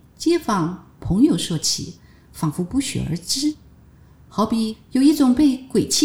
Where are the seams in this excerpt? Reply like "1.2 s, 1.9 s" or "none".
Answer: none